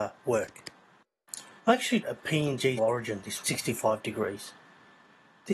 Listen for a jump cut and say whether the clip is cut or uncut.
cut